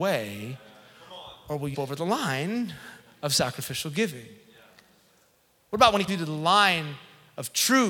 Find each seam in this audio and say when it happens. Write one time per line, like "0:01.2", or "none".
0:01.7
0:06.1